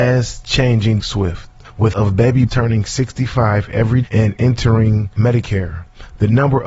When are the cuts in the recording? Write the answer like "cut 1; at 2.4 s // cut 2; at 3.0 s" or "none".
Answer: cut 1; at 1.0 s // cut 2; at 1.9 s // cut 3; at 2.5 s // cut 4; at 4.0 s